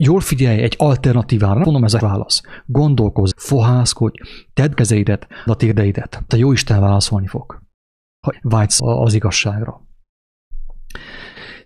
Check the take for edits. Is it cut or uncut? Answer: cut